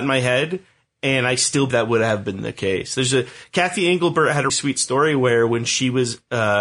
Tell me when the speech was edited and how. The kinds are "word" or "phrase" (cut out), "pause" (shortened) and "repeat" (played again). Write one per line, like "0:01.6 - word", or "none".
0:01.7 - word
0:04.5 - word